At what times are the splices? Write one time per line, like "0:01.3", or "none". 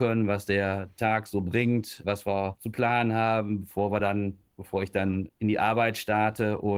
none

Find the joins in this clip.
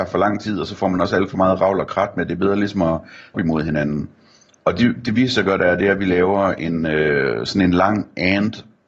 0:03.3

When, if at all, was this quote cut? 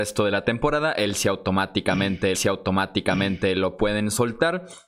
0:02.3

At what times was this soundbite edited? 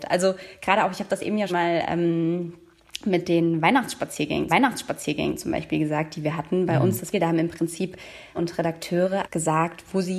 0:01.5
0:04.5
0:07.1
0:08.3
0:09.2

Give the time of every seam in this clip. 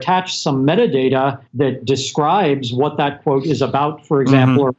0:01.5

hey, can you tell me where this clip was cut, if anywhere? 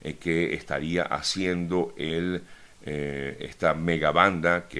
none

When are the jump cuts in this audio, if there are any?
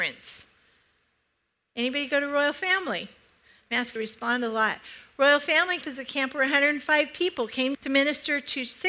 0:04.0
0:05.8
0:07.7

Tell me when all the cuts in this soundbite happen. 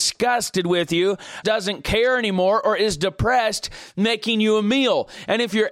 0:01.4

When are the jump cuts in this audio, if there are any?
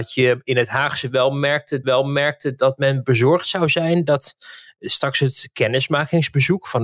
0:01.8

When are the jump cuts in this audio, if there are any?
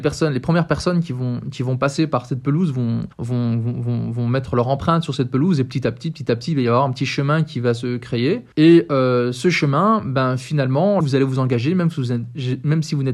0:03.1
0:08.5
0:11.0

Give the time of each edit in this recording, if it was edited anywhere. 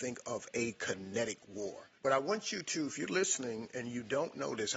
0:02.0

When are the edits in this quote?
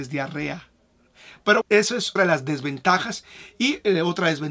0:01.6
0:02.2

